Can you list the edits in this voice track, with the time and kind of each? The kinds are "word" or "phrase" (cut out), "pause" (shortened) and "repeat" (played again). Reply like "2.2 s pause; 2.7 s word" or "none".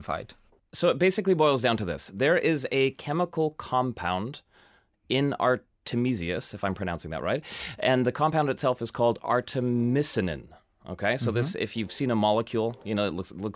none